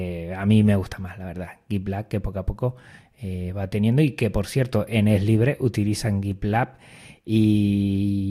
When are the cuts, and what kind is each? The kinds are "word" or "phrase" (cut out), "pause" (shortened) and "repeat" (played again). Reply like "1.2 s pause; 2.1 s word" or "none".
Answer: none